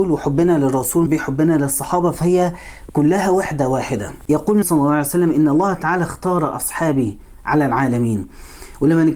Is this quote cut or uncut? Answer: cut